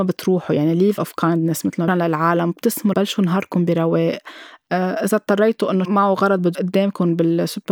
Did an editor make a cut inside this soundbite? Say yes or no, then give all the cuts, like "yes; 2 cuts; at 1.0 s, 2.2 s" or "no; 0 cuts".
yes; 5 cuts; at 1.0 s, 1.9 s, 2.9 s, 5.8 s, 6.5 s